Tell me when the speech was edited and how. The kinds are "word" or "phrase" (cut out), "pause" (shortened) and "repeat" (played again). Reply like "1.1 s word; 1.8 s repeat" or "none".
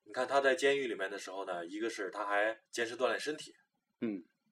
2.7 s pause